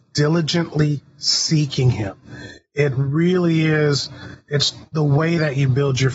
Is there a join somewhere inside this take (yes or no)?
no